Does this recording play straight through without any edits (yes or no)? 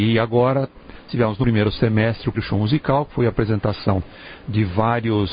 no